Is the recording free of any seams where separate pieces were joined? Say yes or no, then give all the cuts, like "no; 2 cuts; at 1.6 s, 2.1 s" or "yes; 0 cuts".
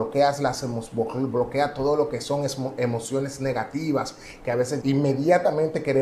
no; 1 cut; at 4.8 s